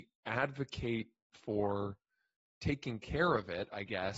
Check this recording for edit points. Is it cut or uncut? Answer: uncut